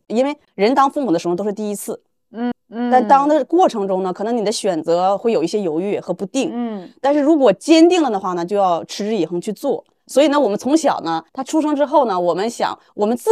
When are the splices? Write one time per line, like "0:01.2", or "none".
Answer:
0:02.5
0:11.3